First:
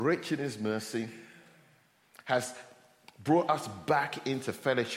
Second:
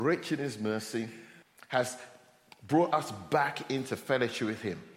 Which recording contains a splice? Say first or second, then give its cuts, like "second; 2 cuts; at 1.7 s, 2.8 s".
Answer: second; 1 cut; at 1.4 s